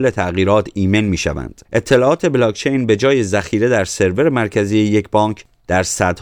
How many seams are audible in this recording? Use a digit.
1